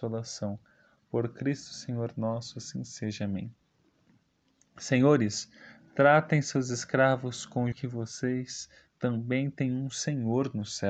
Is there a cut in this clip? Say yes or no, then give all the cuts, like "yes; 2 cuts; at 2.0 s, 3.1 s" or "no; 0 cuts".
yes; 1 cut; at 7.7 s